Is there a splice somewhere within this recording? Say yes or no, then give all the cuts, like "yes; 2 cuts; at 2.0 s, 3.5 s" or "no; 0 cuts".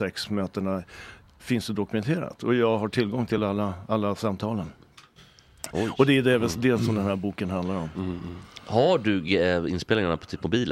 no; 0 cuts